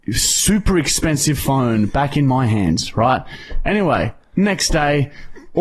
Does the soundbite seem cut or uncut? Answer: uncut